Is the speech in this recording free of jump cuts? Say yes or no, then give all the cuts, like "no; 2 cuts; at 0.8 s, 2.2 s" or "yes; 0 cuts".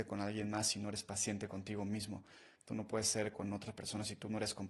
no; 1 cut; at 3.3 s